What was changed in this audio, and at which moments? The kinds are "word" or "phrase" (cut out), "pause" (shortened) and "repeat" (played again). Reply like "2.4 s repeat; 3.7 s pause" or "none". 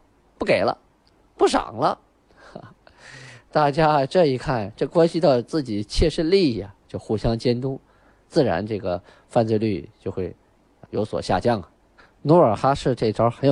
10.9 s word